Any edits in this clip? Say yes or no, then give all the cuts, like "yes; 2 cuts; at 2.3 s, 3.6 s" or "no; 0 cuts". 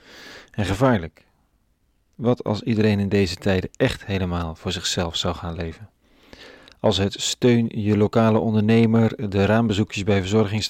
no; 0 cuts